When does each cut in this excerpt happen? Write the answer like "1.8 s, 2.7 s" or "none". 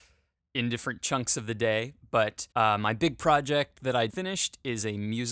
2.5 s, 4.1 s